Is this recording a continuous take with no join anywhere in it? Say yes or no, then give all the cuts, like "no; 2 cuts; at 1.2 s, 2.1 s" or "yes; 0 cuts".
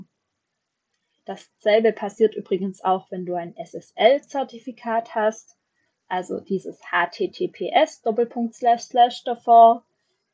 yes; 0 cuts